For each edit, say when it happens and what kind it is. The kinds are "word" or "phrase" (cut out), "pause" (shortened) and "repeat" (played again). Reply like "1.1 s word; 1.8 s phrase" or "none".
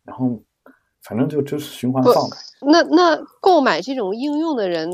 2.6 s phrase